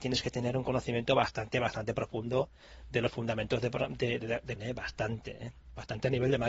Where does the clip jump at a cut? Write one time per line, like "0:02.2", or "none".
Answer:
0:04.6